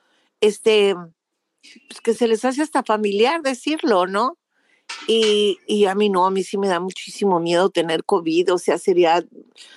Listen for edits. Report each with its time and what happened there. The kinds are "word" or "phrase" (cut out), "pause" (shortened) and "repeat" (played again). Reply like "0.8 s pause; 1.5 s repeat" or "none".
none